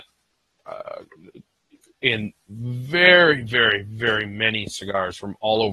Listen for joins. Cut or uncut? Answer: uncut